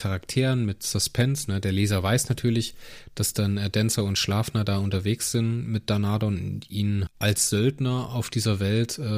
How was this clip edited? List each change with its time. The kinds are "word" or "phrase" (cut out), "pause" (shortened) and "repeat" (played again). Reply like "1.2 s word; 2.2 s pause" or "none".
7.1 s word